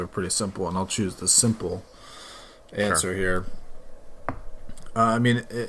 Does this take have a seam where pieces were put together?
no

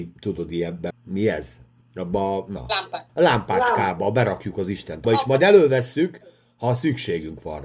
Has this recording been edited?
yes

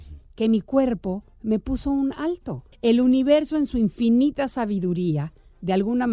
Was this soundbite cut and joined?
yes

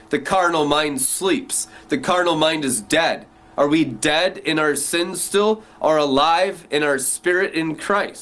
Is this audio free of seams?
yes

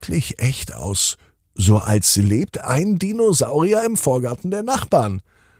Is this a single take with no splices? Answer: yes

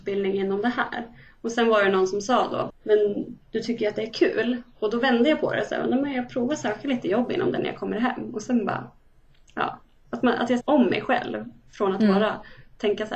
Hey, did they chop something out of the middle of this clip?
yes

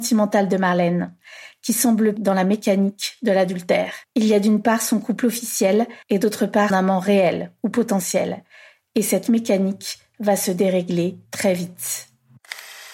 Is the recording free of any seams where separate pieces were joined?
no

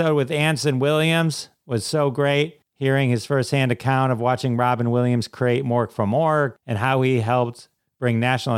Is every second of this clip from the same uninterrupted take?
yes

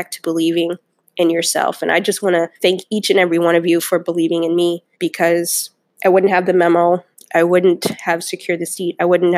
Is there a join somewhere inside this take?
yes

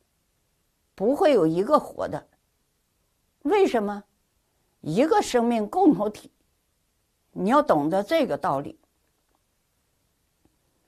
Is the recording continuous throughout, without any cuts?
yes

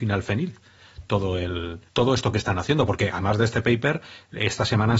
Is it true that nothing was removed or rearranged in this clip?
no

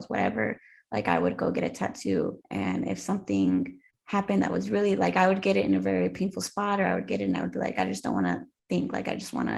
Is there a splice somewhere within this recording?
yes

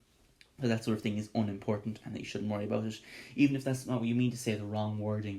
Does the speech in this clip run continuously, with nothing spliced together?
yes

